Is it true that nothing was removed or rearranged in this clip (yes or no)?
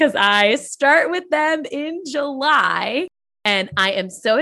yes